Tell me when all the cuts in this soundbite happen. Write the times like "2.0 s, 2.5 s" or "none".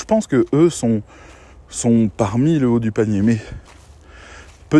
none

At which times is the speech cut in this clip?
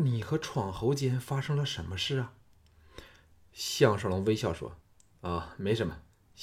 4.8 s

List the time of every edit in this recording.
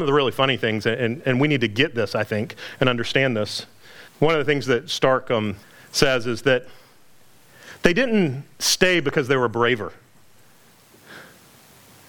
4.1 s, 5.6 s

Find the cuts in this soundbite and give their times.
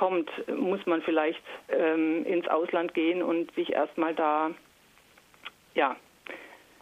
1.6 s

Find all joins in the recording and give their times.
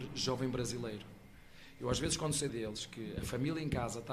2.5 s

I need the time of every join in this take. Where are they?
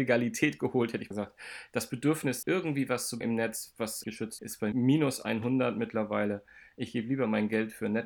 1.1 s, 2.4 s, 3.2 s, 4.0 s, 4.4 s, 4.7 s

